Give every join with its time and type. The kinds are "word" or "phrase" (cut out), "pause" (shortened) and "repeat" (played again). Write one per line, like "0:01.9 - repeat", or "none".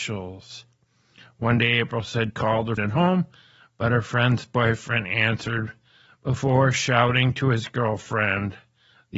0:02.3 - word
0:02.8 - word

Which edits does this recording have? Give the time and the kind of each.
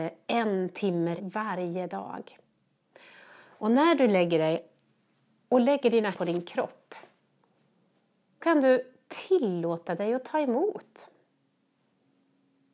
0:01.2 - word
0:06.1 - word
0:08.4 - word

